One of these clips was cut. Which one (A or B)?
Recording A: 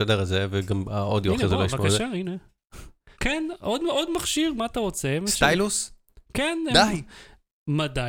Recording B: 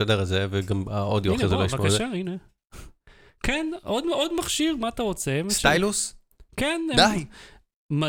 A